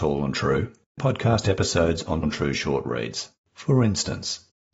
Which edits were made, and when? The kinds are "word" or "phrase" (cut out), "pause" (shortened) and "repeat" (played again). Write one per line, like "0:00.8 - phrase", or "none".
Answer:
0:01.0 - word
0:02.2 - word
0:03.4 - pause